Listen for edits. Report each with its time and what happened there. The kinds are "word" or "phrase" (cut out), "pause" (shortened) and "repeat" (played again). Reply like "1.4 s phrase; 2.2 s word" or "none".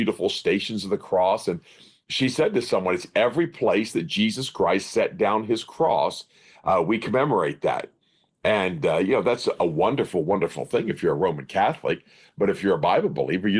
none

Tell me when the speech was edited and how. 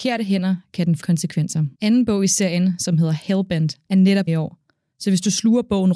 1.0 s word; 1.7 s pause; 3.8 s pause; 4.3 s word

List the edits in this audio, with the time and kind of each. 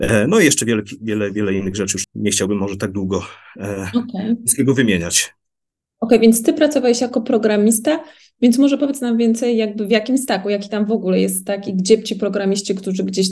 2.0 s word

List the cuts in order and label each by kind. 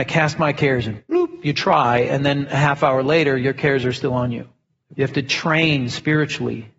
none

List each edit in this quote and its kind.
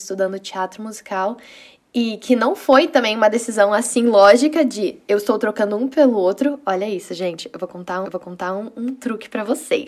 8.0 s repeat

